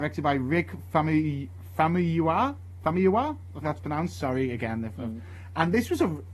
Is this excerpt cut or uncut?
cut